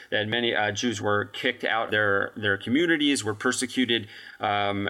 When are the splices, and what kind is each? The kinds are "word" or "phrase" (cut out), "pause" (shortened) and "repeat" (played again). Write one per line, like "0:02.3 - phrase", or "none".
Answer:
0:01.0 - word
0:01.9 - word